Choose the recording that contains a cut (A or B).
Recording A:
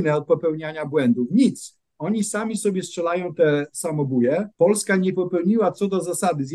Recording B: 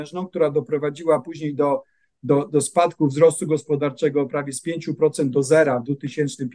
A